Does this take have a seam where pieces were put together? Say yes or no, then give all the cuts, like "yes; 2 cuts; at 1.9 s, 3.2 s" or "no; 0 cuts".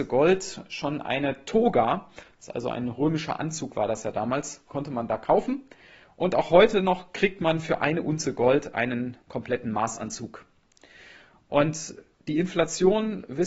yes; 1 cut; at 9.2 s